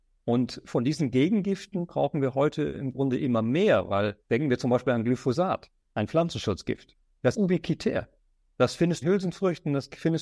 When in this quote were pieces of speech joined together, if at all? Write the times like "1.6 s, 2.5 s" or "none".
4.2 s, 7.3 s, 9.0 s